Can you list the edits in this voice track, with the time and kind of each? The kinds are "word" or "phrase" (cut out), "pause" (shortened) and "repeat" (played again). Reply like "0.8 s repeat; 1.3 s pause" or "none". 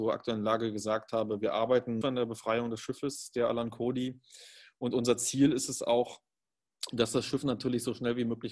2.0 s word